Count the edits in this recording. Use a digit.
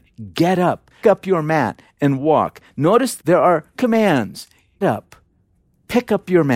4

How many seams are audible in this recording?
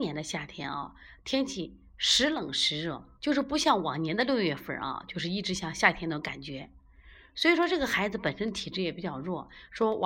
1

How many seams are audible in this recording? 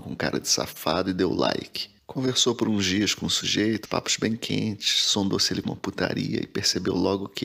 2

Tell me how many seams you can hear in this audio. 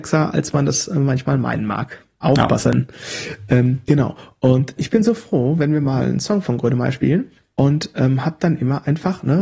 3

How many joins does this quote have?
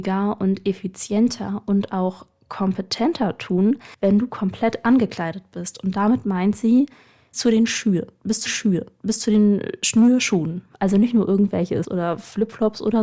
4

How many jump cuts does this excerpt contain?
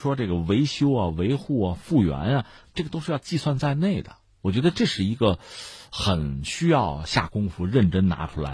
0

